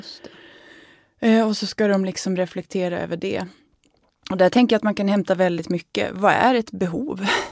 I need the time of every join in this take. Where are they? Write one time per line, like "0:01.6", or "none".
none